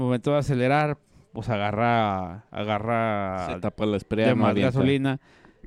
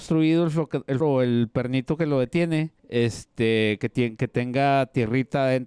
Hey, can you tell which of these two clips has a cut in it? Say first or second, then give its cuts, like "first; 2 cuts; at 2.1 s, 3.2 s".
second; 2 cuts; at 1.0 s, 2.8 s